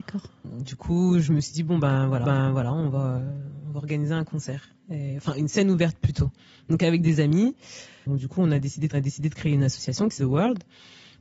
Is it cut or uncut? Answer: cut